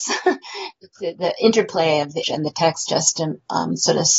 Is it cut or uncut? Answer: cut